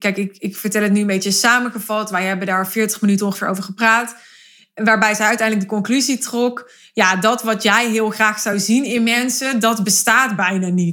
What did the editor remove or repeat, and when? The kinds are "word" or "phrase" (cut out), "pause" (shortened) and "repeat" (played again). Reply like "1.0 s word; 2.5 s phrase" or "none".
none